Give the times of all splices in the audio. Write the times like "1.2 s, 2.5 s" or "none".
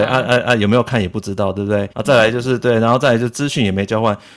1.9 s